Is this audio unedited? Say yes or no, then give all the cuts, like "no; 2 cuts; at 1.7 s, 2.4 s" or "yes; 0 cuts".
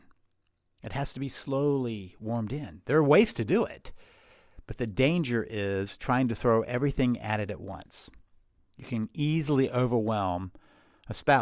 yes; 0 cuts